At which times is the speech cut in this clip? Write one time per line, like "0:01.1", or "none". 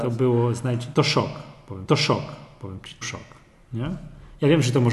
0:00.9
0:01.9
0:03.0